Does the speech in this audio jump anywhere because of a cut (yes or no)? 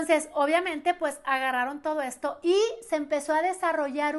no